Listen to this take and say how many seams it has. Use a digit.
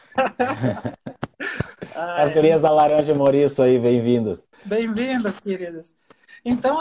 1